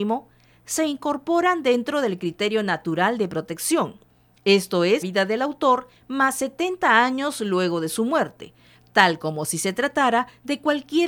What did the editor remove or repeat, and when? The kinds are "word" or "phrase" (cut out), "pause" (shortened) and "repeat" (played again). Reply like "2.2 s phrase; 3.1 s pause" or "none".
5.0 s word